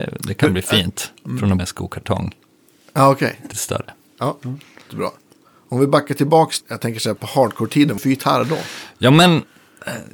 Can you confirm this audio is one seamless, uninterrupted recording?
no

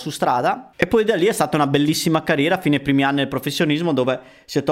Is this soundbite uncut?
yes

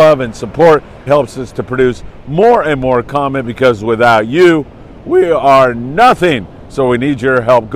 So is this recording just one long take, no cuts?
no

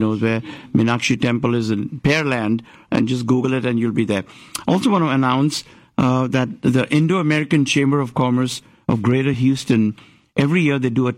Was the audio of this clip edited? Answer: no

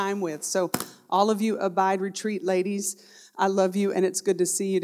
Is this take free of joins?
yes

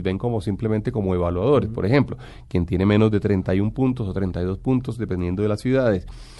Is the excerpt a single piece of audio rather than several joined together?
yes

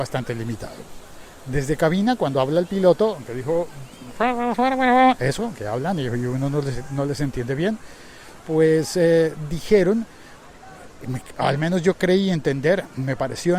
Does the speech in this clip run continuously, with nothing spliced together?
yes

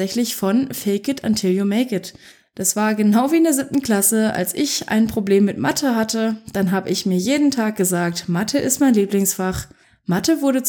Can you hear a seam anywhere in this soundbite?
no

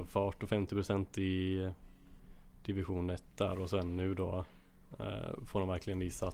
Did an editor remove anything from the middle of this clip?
no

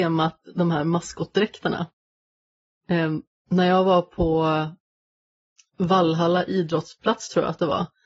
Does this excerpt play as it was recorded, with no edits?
yes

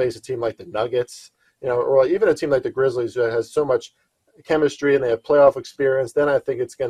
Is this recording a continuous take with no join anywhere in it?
yes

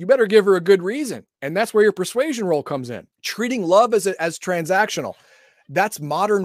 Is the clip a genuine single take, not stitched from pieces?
no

